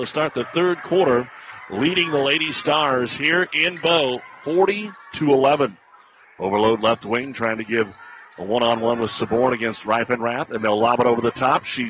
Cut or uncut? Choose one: uncut